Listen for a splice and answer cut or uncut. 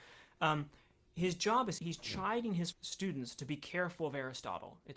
cut